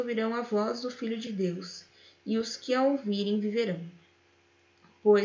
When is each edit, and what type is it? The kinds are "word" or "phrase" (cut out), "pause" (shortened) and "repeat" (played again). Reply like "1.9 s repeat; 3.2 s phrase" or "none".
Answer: none